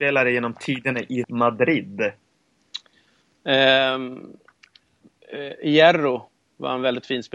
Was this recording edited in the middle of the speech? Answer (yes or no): yes